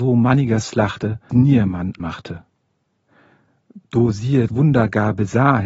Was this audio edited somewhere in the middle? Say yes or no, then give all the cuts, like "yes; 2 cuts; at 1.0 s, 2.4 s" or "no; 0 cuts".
yes; 3 cuts; at 1.3 s, 2.0 s, 4.5 s